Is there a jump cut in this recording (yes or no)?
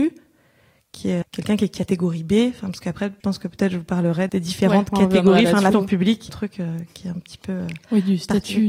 yes